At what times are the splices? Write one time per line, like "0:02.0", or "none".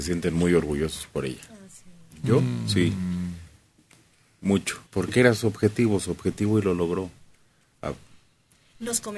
0:04.9